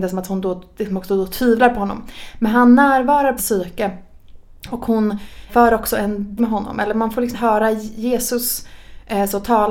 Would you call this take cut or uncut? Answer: cut